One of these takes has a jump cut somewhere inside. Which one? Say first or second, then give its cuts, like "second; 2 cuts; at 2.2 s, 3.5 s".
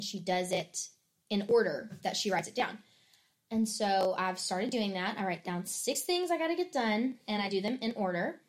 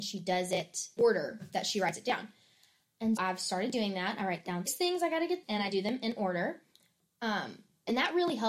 second; 4 cuts; at 1.0 s, 3.2 s, 4.7 s, 5.4 s